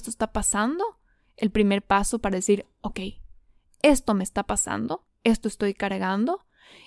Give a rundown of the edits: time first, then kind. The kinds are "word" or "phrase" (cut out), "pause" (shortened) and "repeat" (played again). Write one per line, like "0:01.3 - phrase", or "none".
none